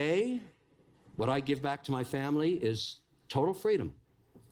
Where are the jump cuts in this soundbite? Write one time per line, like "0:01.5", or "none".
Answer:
0:00.9